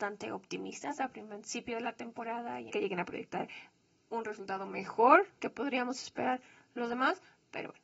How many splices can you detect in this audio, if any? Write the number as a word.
two